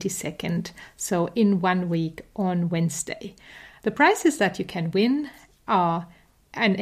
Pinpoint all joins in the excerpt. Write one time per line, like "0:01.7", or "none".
none